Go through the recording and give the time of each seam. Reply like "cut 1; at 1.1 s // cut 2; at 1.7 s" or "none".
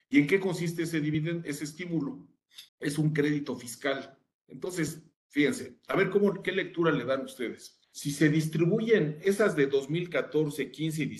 cut 1; at 2.7 s // cut 2; at 4.3 s // cut 3; at 7.8 s